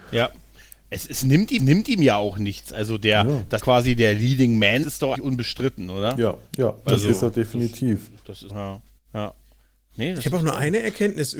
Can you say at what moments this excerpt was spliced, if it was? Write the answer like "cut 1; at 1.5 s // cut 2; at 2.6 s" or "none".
cut 1; at 1.6 s // cut 2; at 3.6 s // cut 3; at 4.8 s // cut 4; at 5.1 s // cut 5; at 6.5 s // cut 6; at 8.2 s // cut 7; at 8.5 s // cut 8; at 9.0 s